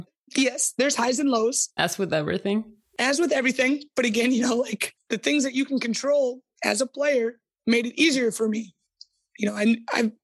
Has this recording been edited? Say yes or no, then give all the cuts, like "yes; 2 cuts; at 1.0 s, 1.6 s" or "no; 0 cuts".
no; 0 cuts